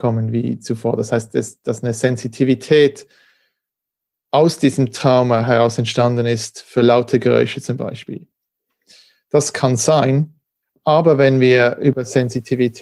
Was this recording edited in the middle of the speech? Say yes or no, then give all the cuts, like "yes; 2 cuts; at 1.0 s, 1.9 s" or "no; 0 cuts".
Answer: no; 0 cuts